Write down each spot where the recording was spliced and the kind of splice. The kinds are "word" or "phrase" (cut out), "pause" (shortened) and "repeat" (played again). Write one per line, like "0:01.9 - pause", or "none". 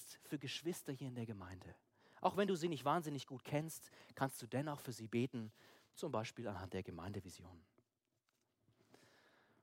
none